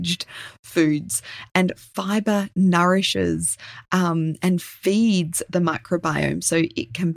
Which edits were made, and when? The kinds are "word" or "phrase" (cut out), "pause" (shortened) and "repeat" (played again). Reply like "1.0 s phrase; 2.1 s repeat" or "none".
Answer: none